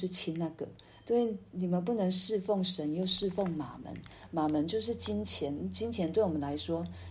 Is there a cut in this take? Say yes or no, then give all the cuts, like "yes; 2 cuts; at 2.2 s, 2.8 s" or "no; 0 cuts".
no; 0 cuts